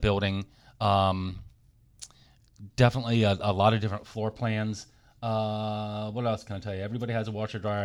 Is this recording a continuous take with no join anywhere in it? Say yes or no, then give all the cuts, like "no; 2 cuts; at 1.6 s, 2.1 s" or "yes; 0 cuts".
yes; 0 cuts